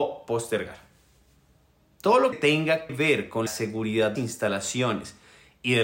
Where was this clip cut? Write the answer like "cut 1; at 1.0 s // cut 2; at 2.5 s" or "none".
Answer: cut 1; at 2.3 s // cut 2; at 2.9 s // cut 3; at 3.5 s // cut 4; at 4.2 s